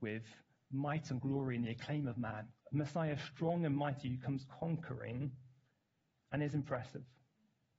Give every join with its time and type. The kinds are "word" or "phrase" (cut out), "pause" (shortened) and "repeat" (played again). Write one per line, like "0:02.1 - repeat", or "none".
0:02.6 - pause